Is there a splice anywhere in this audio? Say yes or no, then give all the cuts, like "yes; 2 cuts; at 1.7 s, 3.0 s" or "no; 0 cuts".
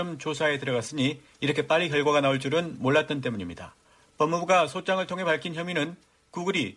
no; 0 cuts